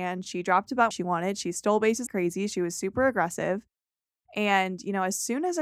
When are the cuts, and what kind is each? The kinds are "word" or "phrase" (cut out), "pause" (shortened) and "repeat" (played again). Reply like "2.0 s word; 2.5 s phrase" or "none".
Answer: 0.9 s word; 2.1 s word